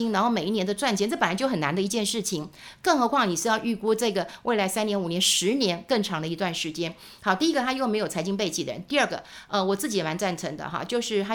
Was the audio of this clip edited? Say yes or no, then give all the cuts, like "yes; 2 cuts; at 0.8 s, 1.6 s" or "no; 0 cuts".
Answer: no; 0 cuts